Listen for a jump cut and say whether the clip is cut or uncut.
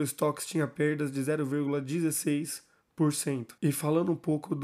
cut